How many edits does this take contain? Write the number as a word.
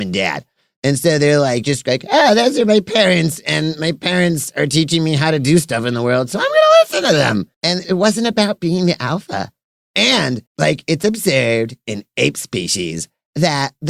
two